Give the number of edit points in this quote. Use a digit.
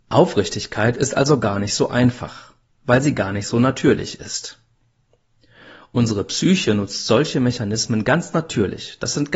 0